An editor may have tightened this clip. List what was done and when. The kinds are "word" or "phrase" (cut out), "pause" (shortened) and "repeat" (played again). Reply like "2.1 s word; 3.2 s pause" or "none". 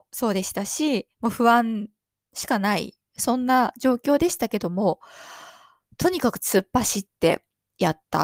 none